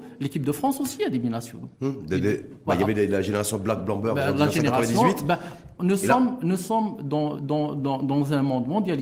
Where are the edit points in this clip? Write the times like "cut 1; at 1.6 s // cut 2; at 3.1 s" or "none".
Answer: cut 1; at 1.7 s // cut 2; at 7.3 s